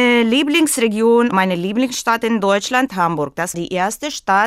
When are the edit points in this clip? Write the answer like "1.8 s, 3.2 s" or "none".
1.3 s, 2.9 s, 3.5 s